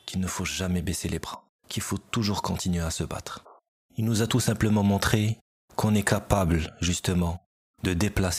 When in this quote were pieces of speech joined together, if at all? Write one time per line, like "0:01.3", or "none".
none